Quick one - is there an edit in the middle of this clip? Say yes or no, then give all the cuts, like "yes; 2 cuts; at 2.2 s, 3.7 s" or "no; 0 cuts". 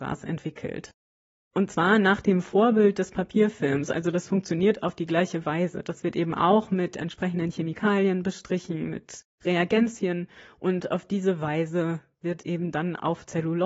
no; 0 cuts